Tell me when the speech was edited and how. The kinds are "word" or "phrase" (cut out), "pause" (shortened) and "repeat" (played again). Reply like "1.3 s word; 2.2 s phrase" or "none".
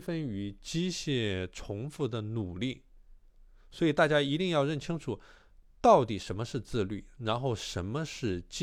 none